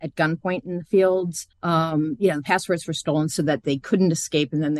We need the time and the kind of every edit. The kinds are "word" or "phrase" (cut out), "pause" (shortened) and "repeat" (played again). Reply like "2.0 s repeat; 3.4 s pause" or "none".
1.5 s pause